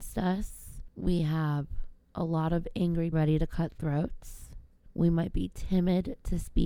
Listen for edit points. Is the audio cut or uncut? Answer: cut